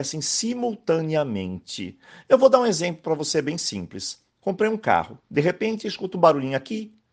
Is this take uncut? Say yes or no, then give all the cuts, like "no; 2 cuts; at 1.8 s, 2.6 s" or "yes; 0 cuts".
yes; 0 cuts